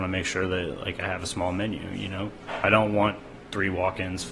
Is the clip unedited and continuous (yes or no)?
yes